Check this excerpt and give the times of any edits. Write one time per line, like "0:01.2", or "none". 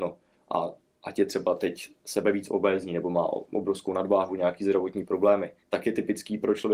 0:05.6